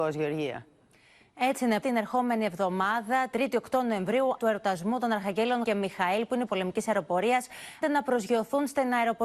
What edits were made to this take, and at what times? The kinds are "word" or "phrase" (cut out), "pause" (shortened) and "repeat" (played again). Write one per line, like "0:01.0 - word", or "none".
0:01.8 - word
0:03.3 - word
0:04.4 - word
0:05.6 - word
0:06.5 - word
0:07.8 - word